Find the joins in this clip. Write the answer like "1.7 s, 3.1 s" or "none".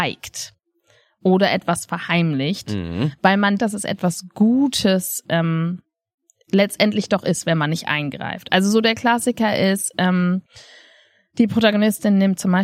3.6 s